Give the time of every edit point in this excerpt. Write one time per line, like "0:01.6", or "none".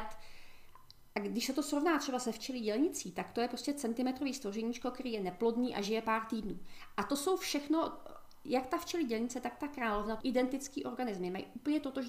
0:10.2